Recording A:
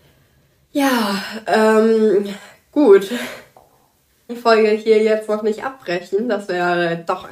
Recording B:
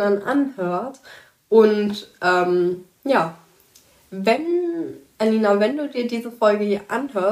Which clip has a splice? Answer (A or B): A